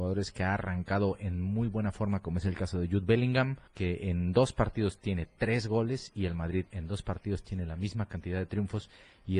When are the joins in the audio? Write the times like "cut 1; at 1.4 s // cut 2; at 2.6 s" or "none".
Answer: cut 1; at 3.7 s